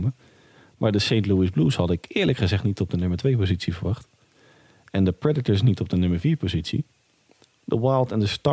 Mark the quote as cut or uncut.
uncut